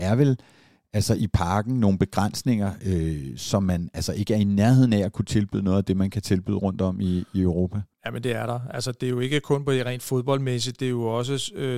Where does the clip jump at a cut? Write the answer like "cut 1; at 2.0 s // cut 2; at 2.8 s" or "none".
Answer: cut 1; at 7.9 s

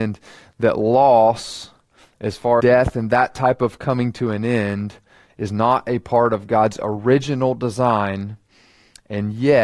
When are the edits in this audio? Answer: cut 1; at 2.6 s

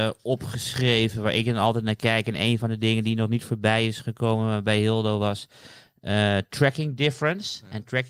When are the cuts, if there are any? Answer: none

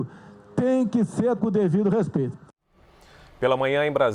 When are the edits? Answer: cut 1; at 1.4 s

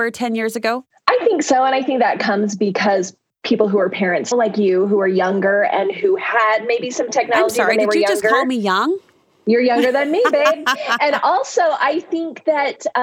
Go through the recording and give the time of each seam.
cut 1; at 4.3 s

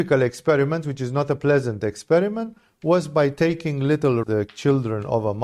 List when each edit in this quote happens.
cut 1; at 4.2 s

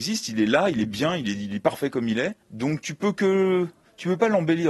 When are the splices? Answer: cut 1; at 2.4 s

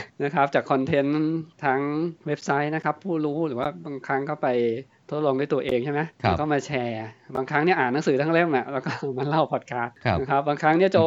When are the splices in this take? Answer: cut 1; at 1.5 s

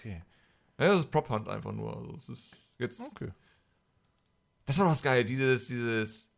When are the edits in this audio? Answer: none

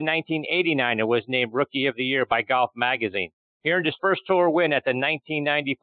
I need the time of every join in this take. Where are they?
none

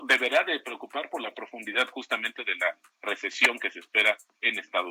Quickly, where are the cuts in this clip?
none

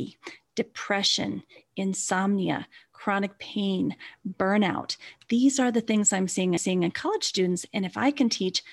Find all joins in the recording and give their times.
cut 1; at 6.6 s

